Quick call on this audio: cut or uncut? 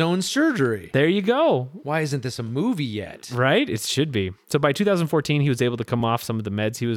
uncut